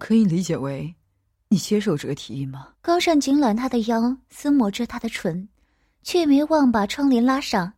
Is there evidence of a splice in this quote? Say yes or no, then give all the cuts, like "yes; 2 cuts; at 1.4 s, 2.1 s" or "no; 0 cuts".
yes; 1 cut; at 2.7 s